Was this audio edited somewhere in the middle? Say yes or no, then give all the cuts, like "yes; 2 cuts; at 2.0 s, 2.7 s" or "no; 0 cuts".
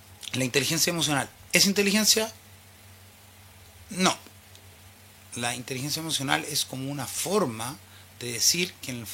no; 0 cuts